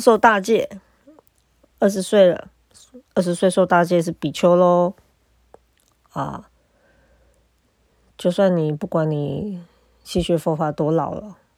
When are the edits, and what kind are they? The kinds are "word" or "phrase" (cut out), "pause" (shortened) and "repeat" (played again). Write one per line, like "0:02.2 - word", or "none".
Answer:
none